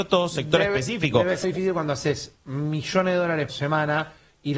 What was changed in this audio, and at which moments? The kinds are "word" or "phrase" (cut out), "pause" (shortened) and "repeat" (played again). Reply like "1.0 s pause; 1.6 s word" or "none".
1.4 s word; 2.4 s pause; 3.5 s word